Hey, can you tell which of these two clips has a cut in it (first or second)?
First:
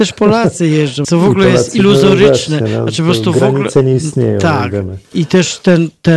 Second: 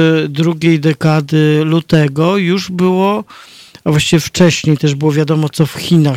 first